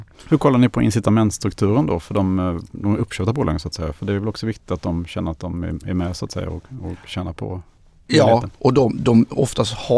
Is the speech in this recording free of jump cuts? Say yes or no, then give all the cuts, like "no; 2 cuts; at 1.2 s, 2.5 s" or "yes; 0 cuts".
yes; 0 cuts